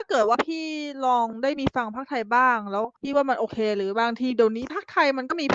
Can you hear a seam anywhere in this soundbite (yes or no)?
yes